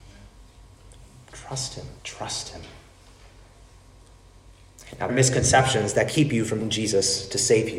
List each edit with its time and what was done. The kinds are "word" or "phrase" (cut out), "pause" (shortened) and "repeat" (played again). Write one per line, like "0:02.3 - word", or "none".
0:02.0 - pause
0:05.1 - word
0:06.1 - word
0:06.6 - word